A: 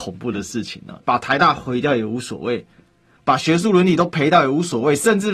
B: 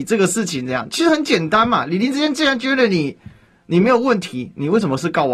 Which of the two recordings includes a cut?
A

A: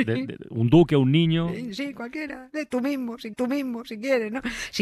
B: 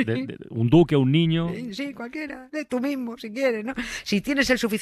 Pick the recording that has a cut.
A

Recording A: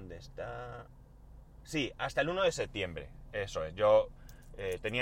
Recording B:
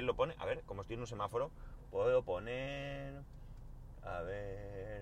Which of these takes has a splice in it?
A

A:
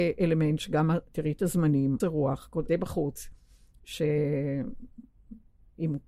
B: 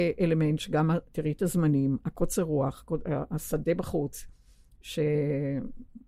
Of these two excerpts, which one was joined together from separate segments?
A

